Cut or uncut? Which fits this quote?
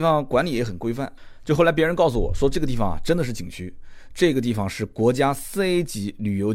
uncut